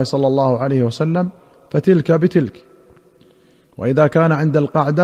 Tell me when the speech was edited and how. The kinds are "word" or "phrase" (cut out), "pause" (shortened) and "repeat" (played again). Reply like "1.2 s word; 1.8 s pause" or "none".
none